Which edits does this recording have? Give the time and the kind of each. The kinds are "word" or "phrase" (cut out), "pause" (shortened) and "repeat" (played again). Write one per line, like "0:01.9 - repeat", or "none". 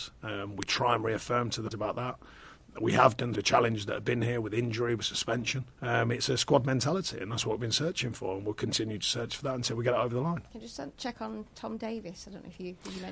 0:01.7 - word
0:03.3 - word
0:05.7 - pause
0:10.5 - pause